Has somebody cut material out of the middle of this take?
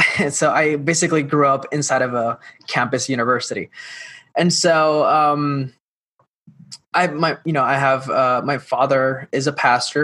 yes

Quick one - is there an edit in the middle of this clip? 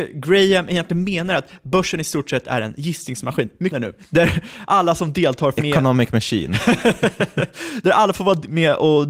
yes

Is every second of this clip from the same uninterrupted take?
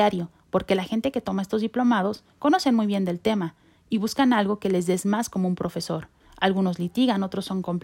no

